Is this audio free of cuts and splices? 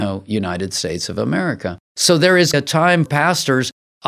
no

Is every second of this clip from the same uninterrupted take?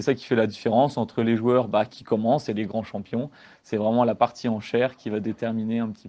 yes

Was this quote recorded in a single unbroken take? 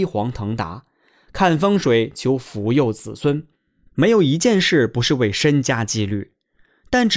yes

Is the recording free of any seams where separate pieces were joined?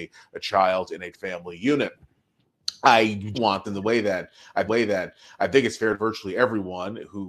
no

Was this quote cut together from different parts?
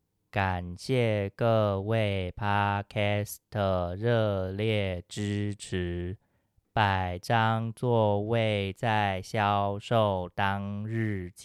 no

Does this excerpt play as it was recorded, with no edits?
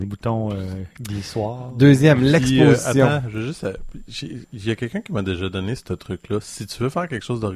yes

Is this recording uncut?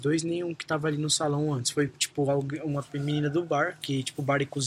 yes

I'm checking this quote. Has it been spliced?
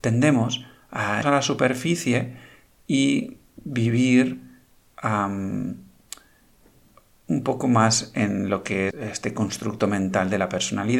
yes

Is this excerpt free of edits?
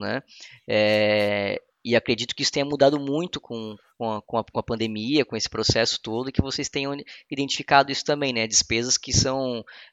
yes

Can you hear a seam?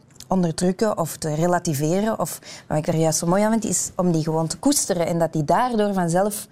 no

